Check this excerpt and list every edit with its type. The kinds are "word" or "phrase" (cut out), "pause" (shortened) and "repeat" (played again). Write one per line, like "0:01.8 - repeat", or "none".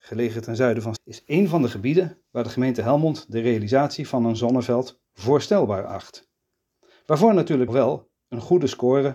0:01.0 - word
0:02.2 - pause
0:07.7 - word

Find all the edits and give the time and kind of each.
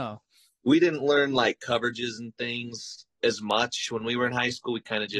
0:03.1 - pause

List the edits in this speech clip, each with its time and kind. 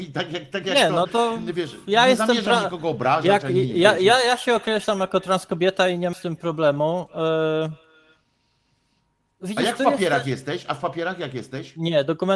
0:06.1 - word

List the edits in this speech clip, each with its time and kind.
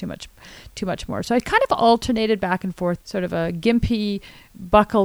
0:03.0 - word

